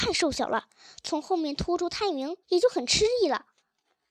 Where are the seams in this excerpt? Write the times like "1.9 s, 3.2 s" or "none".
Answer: 2.4 s